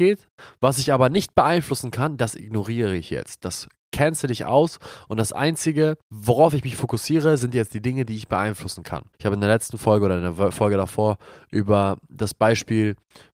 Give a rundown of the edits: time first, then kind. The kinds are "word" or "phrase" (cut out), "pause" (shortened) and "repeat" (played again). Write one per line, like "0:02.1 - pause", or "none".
0:06.0 - pause
0:09.1 - pause